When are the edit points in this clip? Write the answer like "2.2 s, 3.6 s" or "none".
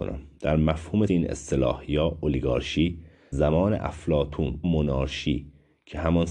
1.1 s, 3.3 s, 4.6 s